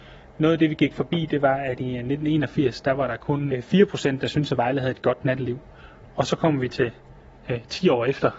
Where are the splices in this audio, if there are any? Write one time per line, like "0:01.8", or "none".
0:03.5